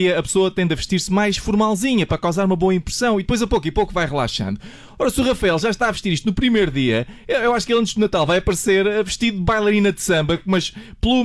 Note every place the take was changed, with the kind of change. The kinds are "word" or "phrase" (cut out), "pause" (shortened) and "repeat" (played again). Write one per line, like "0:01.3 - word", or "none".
none